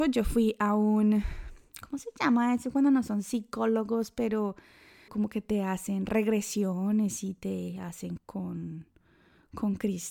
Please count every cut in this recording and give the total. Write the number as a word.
two